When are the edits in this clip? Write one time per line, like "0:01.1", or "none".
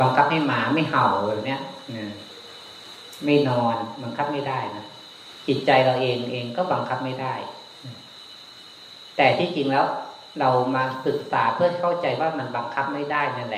none